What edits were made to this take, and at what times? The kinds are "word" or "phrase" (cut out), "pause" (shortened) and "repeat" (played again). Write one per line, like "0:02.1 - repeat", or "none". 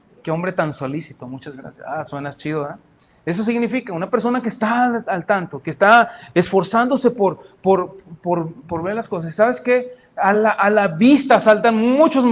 none